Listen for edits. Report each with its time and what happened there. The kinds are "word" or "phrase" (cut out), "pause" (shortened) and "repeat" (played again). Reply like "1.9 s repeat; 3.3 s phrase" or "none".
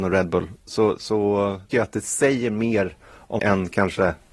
1.7 s word; 3.4 s word